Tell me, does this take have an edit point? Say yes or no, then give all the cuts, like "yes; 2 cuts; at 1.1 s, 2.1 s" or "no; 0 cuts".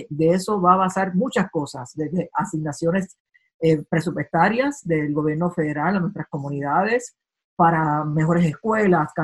no; 0 cuts